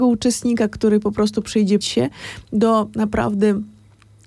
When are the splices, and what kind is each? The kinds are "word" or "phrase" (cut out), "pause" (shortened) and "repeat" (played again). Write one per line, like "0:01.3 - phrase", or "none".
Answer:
0:01.8 - word